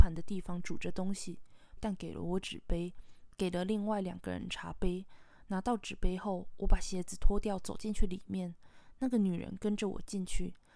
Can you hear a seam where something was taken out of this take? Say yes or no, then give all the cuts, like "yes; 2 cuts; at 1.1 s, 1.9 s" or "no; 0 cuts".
yes; 1 cut; at 1.8 s